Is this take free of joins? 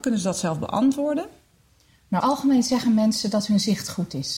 no; 1 cut; at 2.2 s

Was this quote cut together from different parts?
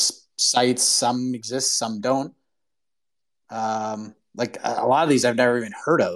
no; 0 cuts

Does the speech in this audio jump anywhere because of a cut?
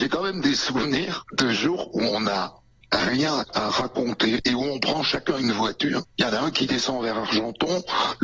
no; 0 cuts

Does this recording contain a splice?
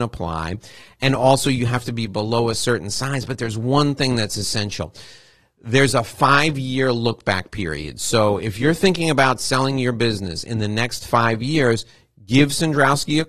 no; 0 cuts

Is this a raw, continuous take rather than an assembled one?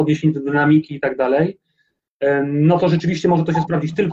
yes; 0 cuts

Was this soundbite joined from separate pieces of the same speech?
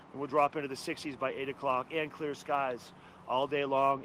no; 0 cuts

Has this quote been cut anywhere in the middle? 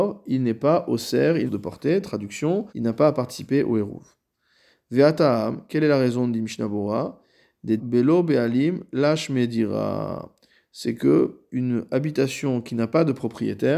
yes; 3 cuts; at 1.5 s, 2.7 s, 7.8 s

